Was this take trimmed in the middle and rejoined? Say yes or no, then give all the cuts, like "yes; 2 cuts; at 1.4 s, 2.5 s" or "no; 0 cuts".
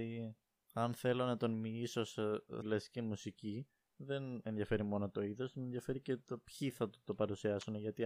yes; 1 cut; at 2.6 s